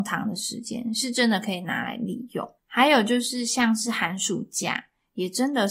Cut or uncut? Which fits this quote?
cut